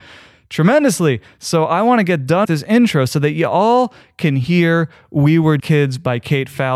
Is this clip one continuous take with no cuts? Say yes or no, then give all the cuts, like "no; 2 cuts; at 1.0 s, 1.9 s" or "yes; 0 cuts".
no; 2 cuts; at 2.4 s, 5.6 s